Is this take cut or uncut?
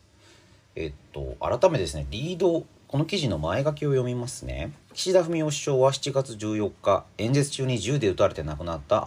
cut